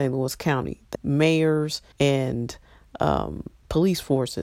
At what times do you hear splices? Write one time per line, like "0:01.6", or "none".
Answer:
0:00.9
0:01.9